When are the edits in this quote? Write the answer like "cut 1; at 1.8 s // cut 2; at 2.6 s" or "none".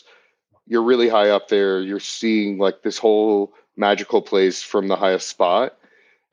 none